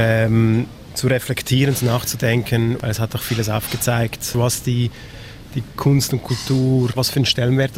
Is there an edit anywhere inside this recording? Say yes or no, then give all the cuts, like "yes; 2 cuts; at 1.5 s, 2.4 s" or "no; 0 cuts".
no; 0 cuts